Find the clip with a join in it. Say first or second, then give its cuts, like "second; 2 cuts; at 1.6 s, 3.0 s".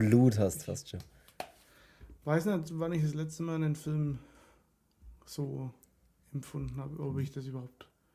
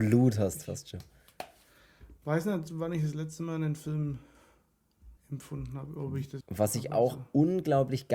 second; 2 cuts; at 5.2 s, 6.4 s